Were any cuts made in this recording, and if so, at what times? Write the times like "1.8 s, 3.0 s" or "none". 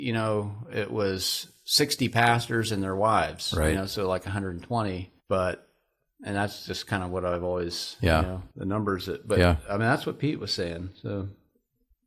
5.2 s, 8.5 s